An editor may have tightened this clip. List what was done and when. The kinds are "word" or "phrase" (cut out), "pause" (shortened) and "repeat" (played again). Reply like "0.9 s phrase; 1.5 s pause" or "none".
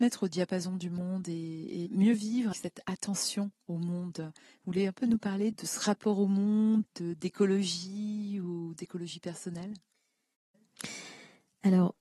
2.5 s word; 5.5 s word; 6.8 s word